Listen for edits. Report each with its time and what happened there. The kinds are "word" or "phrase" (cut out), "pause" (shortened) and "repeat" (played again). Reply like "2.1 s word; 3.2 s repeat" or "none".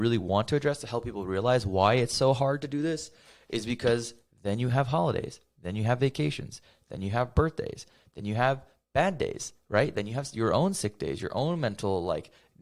none